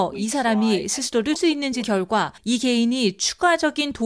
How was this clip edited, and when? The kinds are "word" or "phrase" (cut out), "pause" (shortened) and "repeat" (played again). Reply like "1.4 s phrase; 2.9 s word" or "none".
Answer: 1.4 s word; 1.8 s phrase; 2.4 s pause